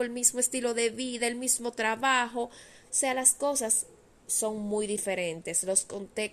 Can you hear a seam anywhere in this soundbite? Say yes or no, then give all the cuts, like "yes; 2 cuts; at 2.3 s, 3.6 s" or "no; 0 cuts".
no; 0 cuts